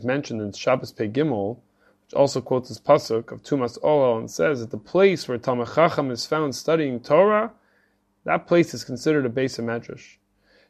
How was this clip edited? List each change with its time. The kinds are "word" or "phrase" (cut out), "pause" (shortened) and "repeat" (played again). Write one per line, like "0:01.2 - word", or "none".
none